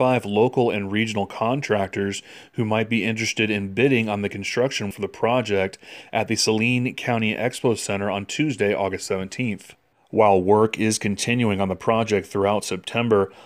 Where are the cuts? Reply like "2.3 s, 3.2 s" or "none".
4.9 s, 9.9 s